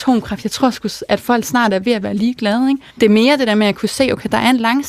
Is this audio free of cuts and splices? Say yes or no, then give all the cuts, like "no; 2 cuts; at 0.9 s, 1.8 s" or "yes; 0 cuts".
no; 1 cut; at 2.9 s